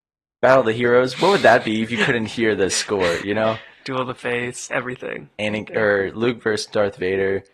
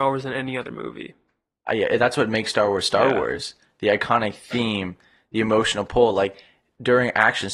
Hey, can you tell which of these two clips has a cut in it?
first; 1 cut; at 4.7 s

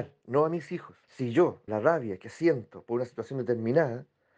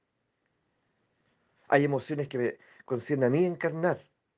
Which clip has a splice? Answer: first; 2 cuts; at 1.0 s, 1.7 s

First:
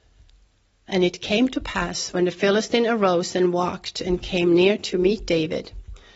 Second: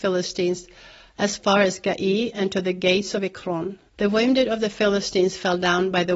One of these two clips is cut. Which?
second; 1 cut; at 3.9 s

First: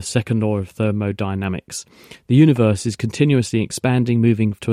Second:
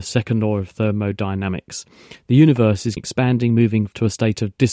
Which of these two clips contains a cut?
second; 1 cut; at 3.0 s

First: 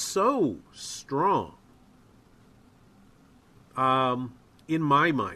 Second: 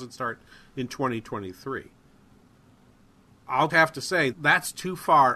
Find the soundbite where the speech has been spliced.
second; 2 cuts; at 3.7 s, 4.3 s

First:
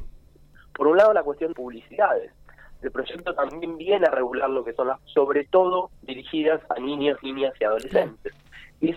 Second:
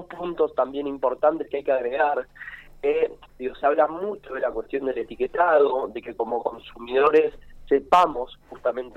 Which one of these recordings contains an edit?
first; 2 cuts; at 1.5 s, 5.0 s

